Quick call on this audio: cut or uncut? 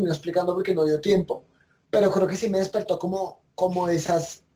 uncut